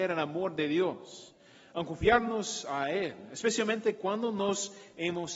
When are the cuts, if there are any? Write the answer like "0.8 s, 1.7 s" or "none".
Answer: none